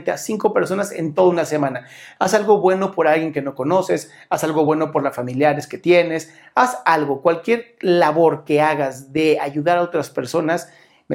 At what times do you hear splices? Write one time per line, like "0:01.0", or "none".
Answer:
none